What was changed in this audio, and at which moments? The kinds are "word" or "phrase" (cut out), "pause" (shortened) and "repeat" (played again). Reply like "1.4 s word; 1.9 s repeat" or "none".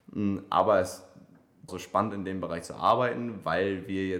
1.7 s phrase